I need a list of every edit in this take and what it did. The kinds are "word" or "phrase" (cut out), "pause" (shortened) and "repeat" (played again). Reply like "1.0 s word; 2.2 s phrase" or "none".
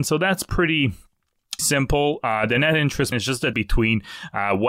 1.6 s word; 3.1 s word; 3.5 s word